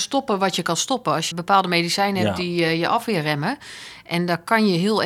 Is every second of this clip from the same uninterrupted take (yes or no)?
no